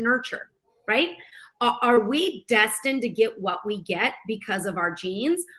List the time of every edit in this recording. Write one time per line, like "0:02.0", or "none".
none